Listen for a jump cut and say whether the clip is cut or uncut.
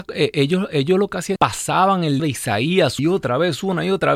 cut